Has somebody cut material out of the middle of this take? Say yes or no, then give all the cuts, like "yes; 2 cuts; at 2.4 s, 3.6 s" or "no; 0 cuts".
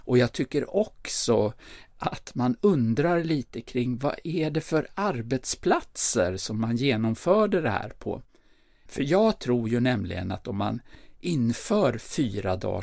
no; 0 cuts